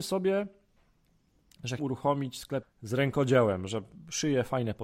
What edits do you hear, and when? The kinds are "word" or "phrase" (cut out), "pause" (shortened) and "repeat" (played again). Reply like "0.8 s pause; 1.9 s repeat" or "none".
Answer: 1.8 s word; 2.6 s word